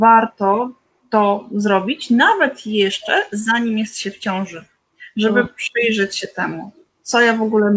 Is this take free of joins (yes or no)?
yes